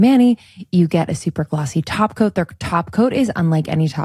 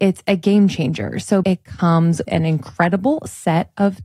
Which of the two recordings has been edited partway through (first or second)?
second